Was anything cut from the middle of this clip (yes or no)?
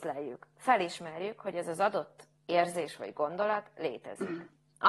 no